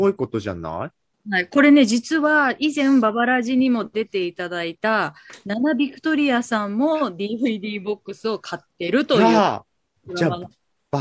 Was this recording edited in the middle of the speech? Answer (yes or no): no